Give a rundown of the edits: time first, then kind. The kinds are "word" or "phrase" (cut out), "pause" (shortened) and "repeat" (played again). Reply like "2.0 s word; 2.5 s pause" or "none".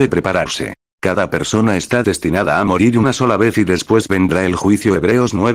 none